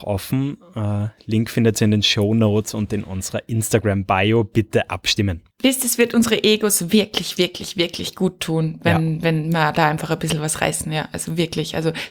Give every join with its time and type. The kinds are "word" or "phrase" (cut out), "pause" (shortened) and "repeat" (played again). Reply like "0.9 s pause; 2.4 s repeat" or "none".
5.5 s pause